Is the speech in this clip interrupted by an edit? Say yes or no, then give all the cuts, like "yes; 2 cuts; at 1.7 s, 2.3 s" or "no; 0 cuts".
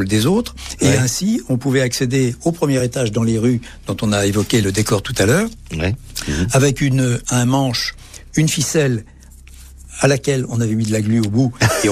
no; 0 cuts